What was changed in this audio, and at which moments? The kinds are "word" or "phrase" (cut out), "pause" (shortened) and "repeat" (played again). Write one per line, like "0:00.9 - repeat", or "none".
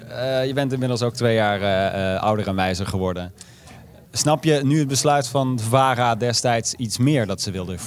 0:04.0 - pause